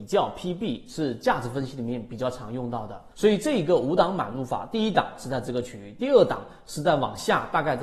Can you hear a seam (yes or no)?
yes